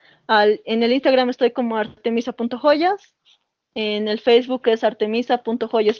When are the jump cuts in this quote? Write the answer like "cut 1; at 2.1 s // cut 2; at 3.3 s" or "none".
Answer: none